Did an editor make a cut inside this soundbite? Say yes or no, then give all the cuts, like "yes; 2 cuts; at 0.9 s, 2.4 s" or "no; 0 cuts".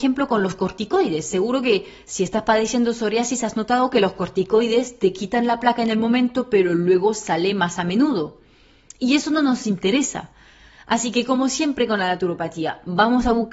no; 0 cuts